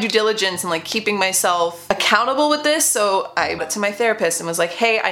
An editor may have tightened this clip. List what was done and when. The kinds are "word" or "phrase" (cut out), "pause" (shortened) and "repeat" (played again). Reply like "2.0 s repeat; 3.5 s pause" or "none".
3.6 s word